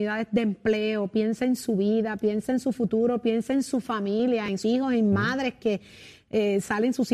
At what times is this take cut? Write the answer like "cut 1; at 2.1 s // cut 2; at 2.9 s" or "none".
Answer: cut 1; at 4.6 s